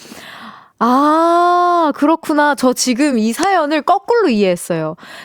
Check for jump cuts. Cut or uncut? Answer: uncut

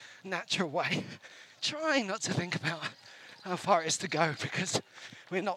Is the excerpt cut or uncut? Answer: uncut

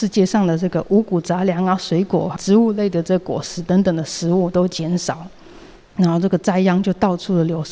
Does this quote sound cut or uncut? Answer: cut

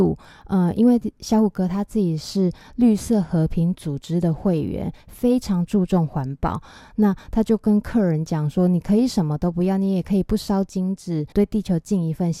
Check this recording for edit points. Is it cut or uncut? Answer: cut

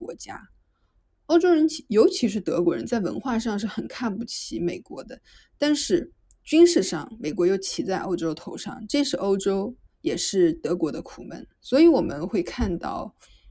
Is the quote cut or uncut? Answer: cut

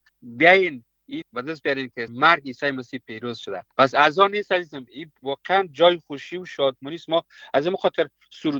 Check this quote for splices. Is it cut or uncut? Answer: cut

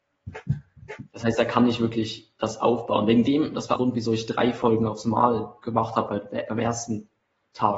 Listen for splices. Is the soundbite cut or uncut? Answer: cut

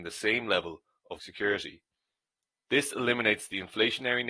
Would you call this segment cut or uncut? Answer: cut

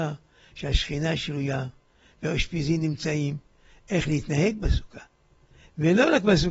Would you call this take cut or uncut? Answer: uncut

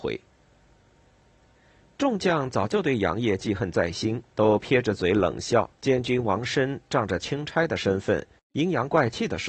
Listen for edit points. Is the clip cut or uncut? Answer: cut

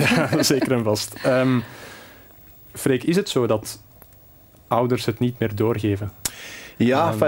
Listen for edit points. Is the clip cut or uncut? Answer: uncut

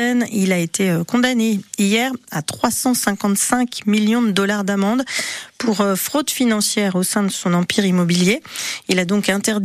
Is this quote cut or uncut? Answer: uncut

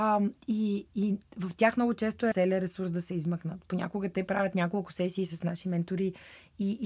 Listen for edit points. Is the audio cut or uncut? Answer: cut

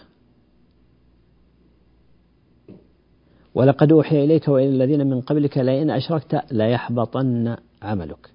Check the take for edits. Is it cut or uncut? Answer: uncut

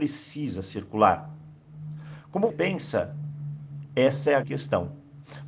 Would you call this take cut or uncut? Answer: cut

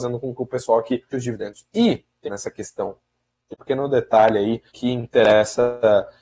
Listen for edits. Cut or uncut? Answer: cut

